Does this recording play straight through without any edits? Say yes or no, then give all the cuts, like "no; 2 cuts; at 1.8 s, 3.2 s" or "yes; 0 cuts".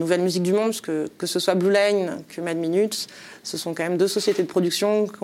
yes; 0 cuts